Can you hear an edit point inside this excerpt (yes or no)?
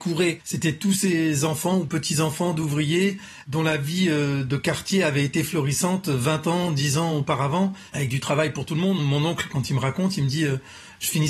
no